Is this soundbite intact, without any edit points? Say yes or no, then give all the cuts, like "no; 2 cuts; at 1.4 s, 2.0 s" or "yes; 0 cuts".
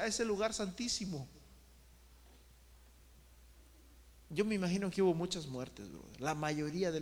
yes; 0 cuts